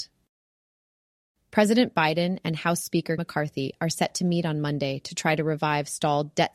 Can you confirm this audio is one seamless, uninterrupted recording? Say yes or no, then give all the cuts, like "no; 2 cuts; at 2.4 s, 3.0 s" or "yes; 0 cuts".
no; 1 cut; at 3.2 s